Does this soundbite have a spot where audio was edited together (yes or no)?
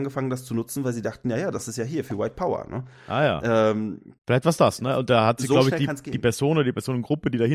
yes